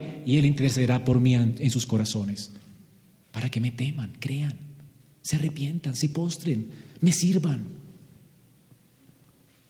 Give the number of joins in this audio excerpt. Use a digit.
0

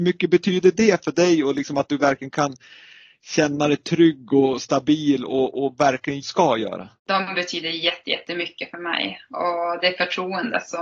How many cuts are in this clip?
2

